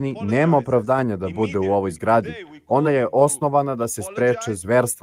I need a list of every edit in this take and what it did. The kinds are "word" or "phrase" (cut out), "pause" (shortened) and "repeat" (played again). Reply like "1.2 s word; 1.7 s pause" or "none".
none